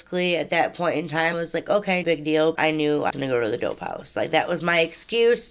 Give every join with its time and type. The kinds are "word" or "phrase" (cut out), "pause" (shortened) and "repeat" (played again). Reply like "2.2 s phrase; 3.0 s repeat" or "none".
1.3 s word; 2.0 s word; 2.5 s word; 3.1 s word